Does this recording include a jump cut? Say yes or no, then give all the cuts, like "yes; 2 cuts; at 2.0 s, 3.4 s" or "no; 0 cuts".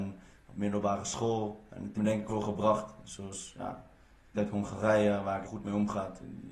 yes; 4 cuts; at 1.9 s, 2.3 s, 4.3 s, 5.4 s